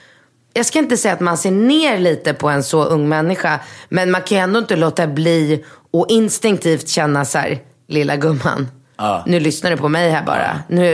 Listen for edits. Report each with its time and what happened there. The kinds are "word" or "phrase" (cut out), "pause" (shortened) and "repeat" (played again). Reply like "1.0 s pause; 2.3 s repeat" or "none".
none